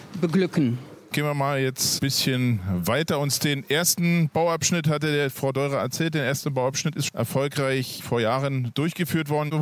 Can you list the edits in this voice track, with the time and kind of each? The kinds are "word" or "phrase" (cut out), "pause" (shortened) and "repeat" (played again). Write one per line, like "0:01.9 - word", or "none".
0:07.1 - word